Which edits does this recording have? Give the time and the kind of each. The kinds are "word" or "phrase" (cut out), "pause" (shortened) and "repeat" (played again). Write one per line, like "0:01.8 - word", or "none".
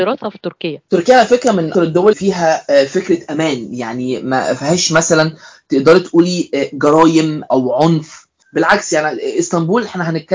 0:01.7 - word
0:02.1 - word
0:07.5 - word